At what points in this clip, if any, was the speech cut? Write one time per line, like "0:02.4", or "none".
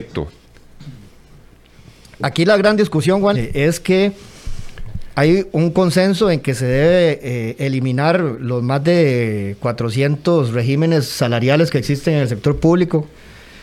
0:03.3

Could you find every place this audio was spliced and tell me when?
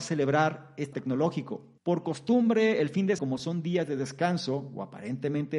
0:00.9
0:01.8
0:03.2

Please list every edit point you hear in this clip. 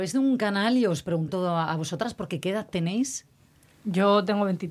0:01.3

